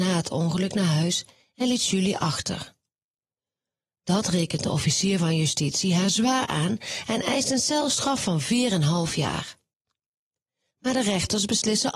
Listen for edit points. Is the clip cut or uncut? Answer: uncut